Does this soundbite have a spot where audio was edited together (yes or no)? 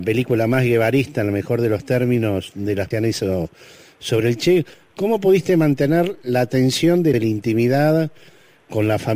yes